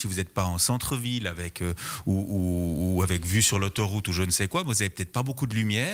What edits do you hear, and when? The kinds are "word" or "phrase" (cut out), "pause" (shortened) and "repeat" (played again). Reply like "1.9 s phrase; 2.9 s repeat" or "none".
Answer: none

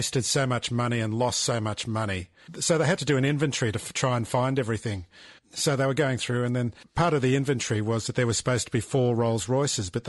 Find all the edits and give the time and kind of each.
none

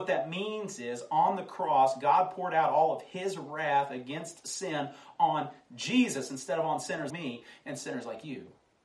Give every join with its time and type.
7.1 s word

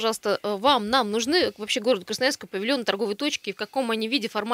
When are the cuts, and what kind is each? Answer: none

